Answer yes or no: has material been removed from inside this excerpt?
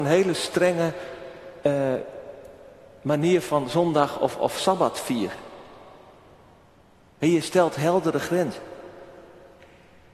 no